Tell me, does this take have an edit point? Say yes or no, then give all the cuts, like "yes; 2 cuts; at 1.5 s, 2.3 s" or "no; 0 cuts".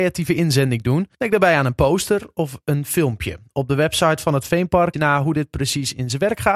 yes; 2 cuts; at 1.1 s, 4.9 s